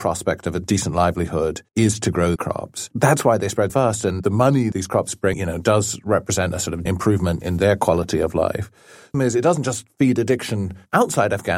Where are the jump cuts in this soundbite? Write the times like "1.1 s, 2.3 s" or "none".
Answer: 1.7 s, 2.4 s, 3.7 s, 4.7 s, 5.3 s, 6.9 s, 7.4 s, 9.1 s